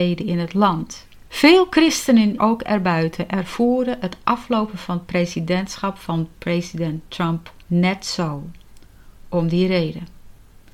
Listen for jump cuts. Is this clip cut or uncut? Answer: cut